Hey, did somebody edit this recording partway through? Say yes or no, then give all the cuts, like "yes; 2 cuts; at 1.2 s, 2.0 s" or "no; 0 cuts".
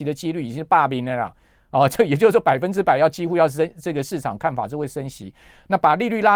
no; 0 cuts